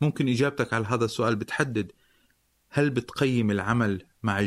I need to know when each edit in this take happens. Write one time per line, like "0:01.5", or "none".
none